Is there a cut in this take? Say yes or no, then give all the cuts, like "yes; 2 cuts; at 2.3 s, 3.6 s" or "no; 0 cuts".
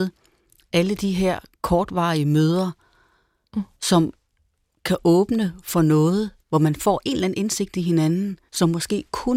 yes; 3 cuts; at 3.7 s, 6.4 s, 8.5 s